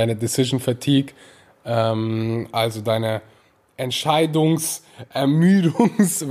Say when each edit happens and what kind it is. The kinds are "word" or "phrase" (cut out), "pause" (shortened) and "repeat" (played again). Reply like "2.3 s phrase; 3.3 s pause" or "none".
none